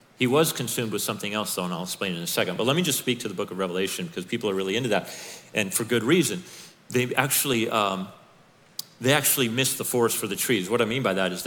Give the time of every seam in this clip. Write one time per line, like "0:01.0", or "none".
none